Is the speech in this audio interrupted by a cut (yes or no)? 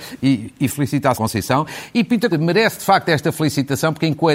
yes